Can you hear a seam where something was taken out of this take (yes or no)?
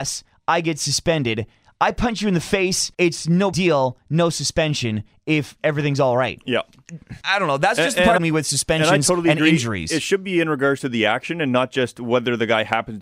yes